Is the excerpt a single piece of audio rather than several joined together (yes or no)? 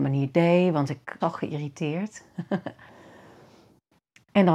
no